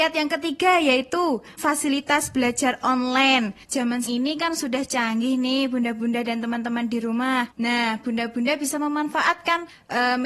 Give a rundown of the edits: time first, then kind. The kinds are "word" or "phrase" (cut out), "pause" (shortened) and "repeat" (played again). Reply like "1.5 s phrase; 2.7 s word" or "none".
1.6 s word; 4.0 s word